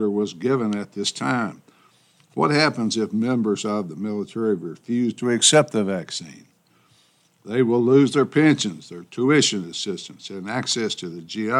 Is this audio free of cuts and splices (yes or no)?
yes